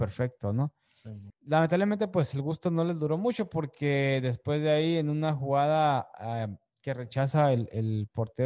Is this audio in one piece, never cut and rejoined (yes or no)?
yes